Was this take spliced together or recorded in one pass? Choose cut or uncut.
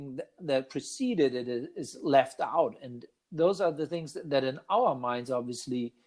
uncut